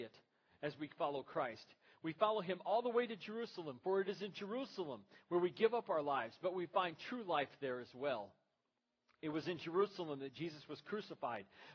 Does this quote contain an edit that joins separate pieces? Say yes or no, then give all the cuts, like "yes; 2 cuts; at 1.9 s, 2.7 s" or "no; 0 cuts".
no; 0 cuts